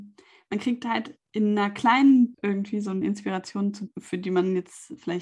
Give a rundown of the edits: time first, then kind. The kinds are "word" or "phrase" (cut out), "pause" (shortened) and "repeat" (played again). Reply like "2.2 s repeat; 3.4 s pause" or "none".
1.3 s pause; 2.3 s word; 3.0 s word; 3.9 s word